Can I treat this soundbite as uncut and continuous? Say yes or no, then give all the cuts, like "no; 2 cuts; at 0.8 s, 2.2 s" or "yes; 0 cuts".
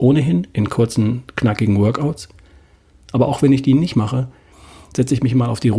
yes; 0 cuts